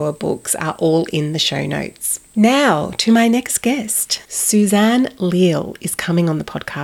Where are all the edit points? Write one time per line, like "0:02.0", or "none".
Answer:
0:02.3